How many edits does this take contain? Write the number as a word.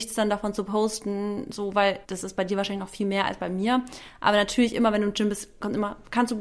one